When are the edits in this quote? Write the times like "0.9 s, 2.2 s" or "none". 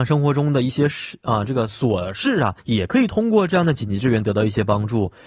2.6 s

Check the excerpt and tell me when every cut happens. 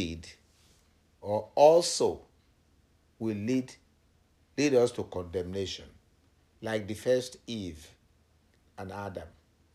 none

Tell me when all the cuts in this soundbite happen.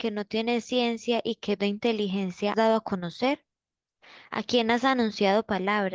1.6 s, 2.5 s

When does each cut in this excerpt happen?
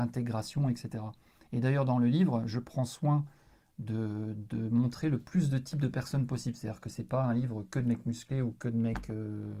none

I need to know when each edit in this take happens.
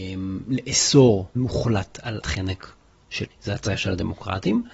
1.3 s, 2.2 s, 3.3 s

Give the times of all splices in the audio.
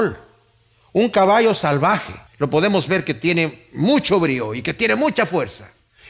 2.3 s

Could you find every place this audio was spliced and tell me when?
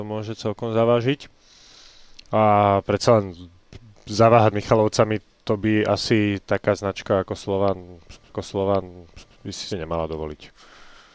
4.5 s, 8.3 s, 9.7 s

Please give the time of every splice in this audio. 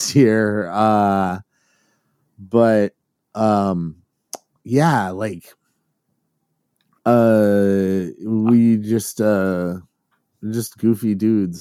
none

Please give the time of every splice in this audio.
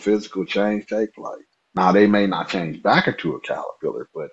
1.5 s

